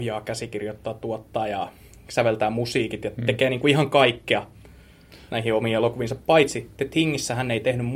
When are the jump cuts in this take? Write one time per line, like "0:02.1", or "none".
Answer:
none